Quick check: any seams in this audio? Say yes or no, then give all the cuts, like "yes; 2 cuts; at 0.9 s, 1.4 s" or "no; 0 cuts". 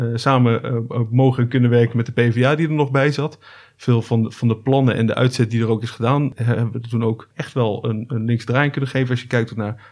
no; 0 cuts